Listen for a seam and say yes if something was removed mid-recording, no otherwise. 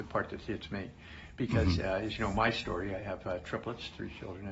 no